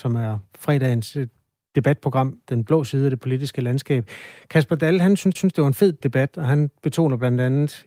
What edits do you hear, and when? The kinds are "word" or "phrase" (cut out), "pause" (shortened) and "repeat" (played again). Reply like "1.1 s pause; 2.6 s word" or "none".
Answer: 2.4 s word; 5.3 s repeat; 6.0 s word